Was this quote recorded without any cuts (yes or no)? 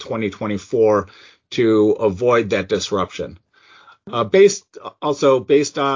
yes